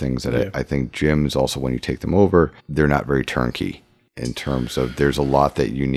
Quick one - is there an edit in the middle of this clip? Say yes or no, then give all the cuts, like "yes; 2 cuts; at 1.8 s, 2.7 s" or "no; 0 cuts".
yes; 1 cut; at 2.6 s